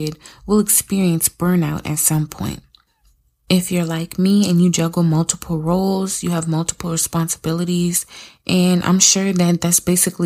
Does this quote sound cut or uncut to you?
uncut